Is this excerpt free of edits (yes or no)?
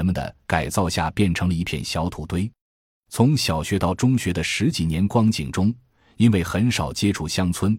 yes